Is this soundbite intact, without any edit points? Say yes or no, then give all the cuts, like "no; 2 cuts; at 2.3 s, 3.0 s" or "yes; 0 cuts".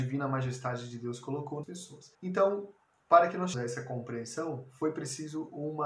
no; 3 cuts; at 1.6 s, 2.1 s, 3.5 s